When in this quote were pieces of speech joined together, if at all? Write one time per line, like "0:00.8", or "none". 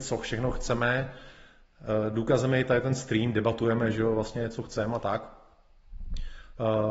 none